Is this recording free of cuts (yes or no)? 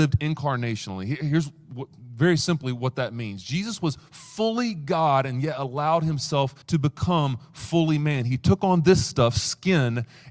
no